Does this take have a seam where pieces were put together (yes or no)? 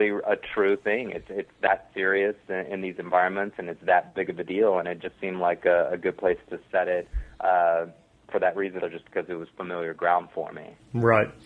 yes